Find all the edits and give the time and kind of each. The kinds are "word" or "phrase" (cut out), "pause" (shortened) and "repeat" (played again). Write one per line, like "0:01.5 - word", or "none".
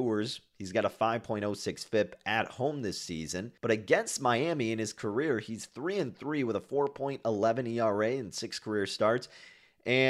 0:03.6 - pause